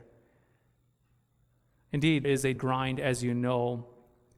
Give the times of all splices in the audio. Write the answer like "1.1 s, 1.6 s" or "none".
2.2 s, 2.6 s